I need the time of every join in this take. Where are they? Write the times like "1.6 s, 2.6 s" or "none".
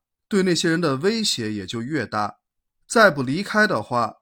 none